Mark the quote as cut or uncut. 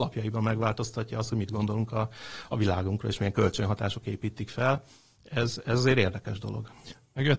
uncut